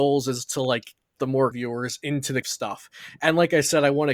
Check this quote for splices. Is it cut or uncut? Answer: cut